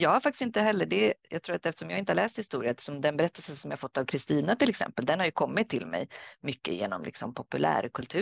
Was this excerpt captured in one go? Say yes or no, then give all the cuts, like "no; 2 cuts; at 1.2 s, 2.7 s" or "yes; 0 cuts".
yes; 0 cuts